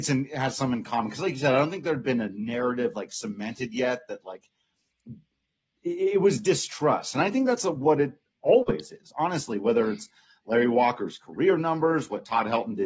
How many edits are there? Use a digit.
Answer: 0